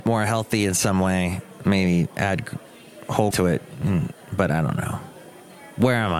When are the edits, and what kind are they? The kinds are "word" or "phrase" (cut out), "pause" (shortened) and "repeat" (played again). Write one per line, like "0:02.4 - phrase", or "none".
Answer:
0:03.3 - word